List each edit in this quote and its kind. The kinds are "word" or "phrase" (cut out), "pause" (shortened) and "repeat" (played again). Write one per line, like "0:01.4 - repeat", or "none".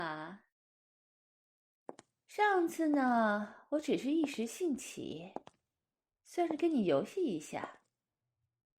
none